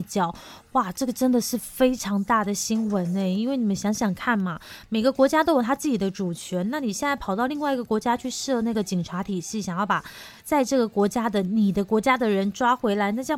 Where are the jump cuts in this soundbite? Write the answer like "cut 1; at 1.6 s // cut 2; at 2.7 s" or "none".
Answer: cut 1; at 10.4 s

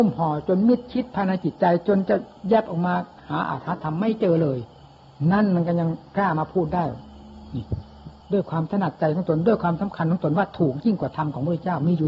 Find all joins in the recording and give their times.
cut 1; at 8.2 s

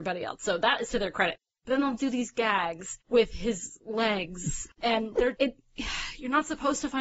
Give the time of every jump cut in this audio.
cut 1; at 5.3 s

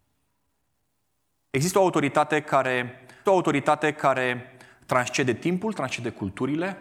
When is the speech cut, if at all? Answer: cut 1; at 3.3 s

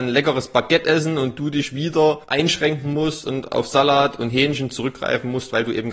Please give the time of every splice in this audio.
cut 1; at 2.2 s

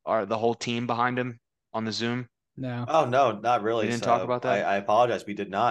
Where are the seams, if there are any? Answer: none

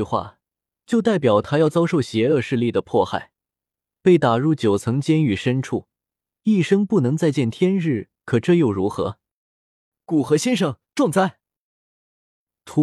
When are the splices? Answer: none

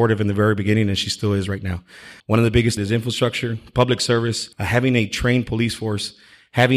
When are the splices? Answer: cut 1; at 2.2 s // cut 2; at 2.8 s // cut 3; at 4.5 s

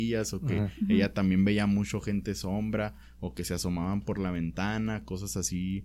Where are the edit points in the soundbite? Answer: none

